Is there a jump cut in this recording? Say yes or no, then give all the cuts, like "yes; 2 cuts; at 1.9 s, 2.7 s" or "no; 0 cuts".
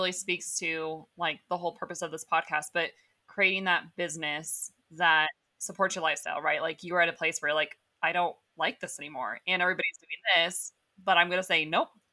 no; 0 cuts